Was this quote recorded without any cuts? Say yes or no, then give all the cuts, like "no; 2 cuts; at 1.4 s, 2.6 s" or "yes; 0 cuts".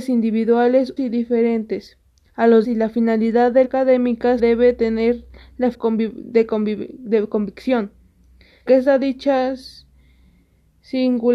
no; 6 cuts; at 1.0 s, 2.6 s, 3.6 s, 4.4 s, 5.7 s, 8.7 s